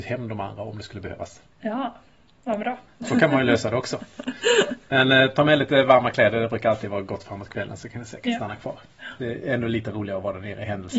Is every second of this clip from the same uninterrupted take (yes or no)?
yes